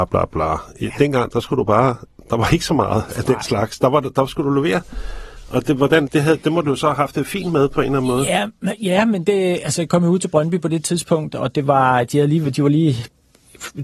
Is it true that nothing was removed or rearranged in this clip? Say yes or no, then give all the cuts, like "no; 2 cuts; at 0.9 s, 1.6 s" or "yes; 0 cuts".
no; 1 cut; at 6.1 s